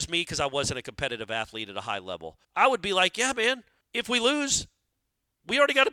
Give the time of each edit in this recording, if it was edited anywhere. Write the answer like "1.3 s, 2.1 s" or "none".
2.4 s, 3.8 s

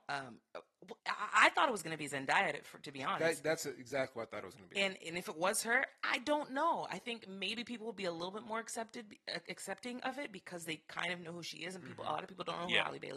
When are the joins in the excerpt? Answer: 1.0 s

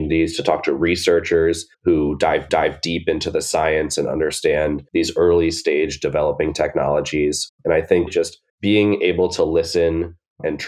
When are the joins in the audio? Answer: 1.7 s, 2.5 s, 4.9 s, 8.1 s, 8.5 s

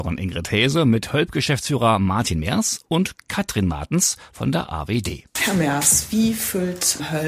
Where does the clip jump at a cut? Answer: none

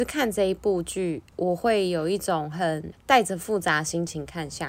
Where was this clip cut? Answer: 1.3 s

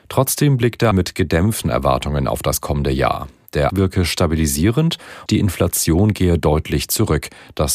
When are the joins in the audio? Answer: 0.9 s, 1.6 s, 3.7 s, 5.3 s

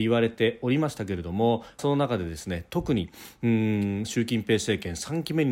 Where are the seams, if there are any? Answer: 1.8 s

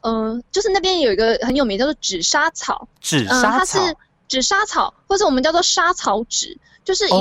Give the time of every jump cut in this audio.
3.0 s

